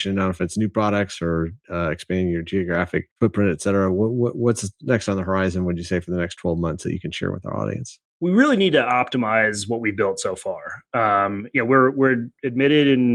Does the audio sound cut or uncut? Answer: cut